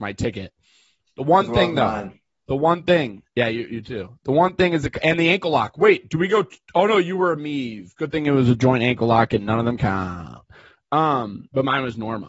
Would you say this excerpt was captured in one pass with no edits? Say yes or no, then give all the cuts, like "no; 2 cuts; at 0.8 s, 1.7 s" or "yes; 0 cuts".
no; 1 cut; at 6.6 s